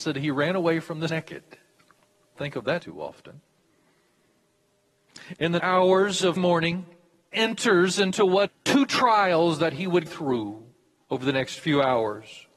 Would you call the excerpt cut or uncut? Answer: cut